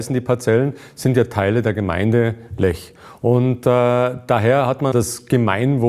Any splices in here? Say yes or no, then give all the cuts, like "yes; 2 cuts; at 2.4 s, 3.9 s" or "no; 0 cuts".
yes; 1 cut; at 4.9 s